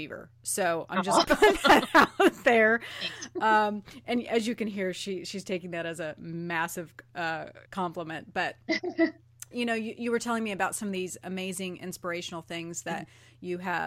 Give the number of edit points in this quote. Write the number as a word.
three